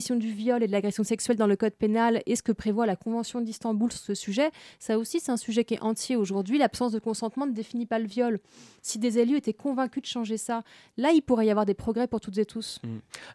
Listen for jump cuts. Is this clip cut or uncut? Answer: uncut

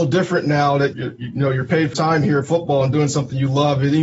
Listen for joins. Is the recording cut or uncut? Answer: cut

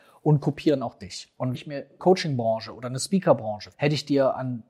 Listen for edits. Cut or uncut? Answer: cut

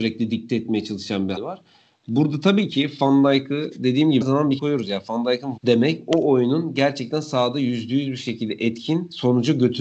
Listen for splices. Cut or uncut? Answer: cut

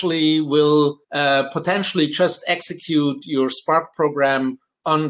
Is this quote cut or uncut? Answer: cut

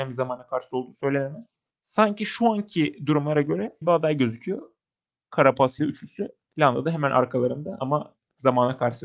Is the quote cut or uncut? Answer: cut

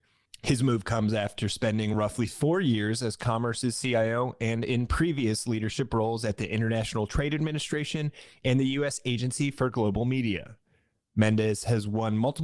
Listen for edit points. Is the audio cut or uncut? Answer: uncut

